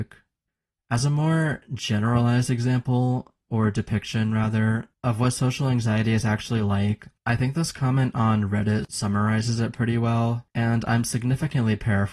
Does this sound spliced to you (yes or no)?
yes